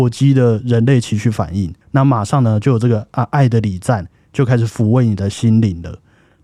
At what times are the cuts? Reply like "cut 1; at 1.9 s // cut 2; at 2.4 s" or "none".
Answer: cut 1; at 1.8 s